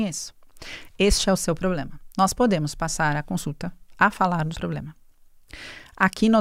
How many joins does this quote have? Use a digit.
1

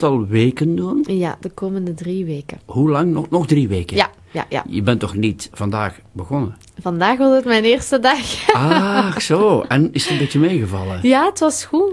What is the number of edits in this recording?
1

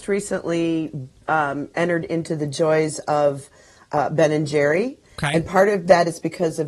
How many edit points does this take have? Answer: 0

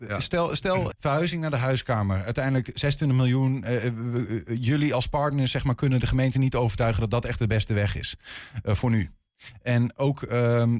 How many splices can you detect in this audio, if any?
1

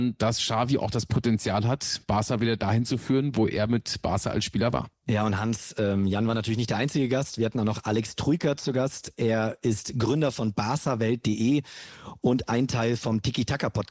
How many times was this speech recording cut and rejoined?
0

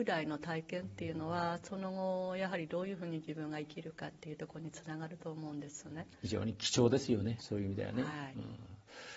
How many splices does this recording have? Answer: 1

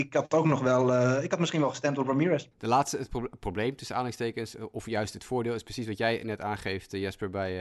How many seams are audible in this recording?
1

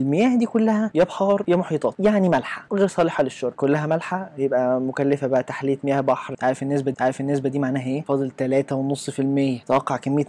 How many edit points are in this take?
1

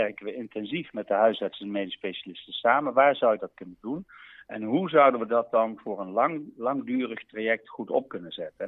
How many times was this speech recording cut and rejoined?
0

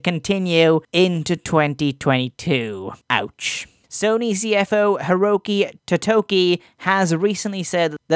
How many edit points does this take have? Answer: 0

